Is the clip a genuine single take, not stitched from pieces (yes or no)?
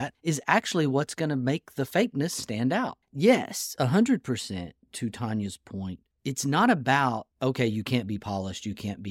yes